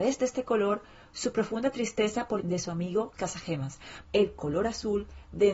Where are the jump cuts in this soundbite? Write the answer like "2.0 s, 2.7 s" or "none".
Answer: 2.4 s, 3.1 s, 4.0 s